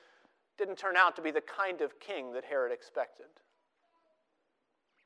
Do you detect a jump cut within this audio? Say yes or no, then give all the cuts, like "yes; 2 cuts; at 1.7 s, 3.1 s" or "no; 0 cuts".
no; 0 cuts